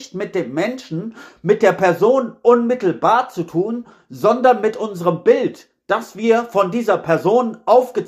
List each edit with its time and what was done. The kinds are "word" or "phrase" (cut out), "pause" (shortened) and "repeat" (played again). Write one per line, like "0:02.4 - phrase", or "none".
none